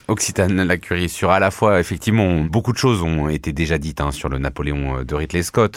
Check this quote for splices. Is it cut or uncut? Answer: uncut